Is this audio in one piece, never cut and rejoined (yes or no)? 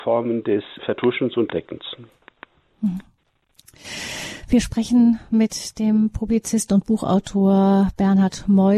yes